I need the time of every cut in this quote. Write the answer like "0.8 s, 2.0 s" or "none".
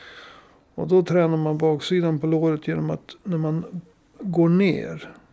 none